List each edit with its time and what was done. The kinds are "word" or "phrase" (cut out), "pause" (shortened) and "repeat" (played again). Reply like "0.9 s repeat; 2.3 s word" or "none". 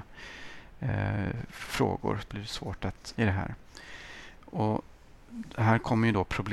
2.3 s word; 3.1 s word